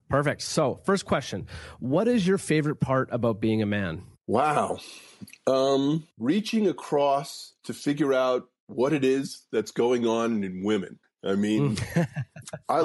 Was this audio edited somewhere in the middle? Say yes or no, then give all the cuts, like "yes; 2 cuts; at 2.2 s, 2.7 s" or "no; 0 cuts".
yes; 3 cuts; at 6.1 s, 7.6 s, 11.0 s